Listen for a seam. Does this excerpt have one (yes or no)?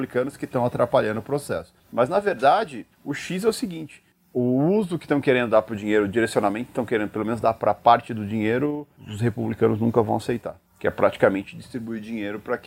yes